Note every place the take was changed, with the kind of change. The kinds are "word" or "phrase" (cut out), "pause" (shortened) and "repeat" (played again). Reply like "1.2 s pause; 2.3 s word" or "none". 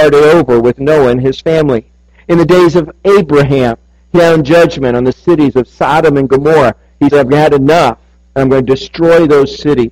4.1 s word; 7.1 s word